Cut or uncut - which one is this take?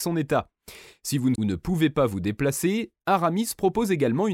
cut